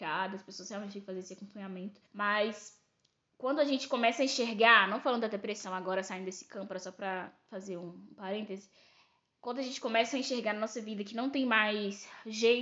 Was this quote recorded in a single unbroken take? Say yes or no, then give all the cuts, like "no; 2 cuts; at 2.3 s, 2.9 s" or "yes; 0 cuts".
no; 1 cut; at 2.1 s